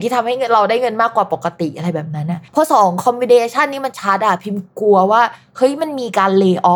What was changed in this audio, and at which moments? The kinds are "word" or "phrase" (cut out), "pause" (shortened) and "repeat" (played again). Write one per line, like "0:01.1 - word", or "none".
0:02.5 - pause